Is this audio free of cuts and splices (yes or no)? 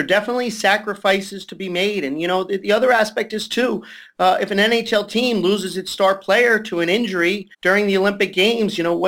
no